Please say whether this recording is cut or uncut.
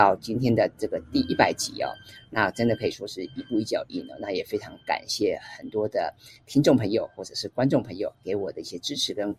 cut